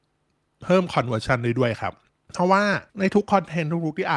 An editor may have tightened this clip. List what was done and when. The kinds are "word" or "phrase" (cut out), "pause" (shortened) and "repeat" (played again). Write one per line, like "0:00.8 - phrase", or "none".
0:02.1 - pause
0:02.9 - pause